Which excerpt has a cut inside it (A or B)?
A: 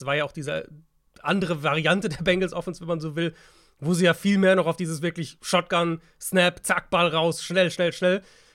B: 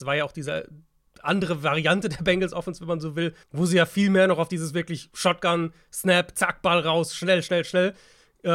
B